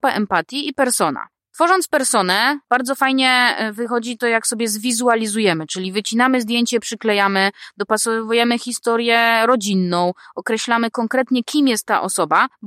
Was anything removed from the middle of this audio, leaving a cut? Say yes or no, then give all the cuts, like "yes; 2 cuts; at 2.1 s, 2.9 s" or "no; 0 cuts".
no; 0 cuts